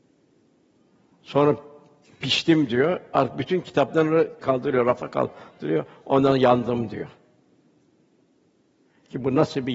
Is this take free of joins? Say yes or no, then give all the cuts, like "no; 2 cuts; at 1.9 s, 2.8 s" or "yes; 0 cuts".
yes; 0 cuts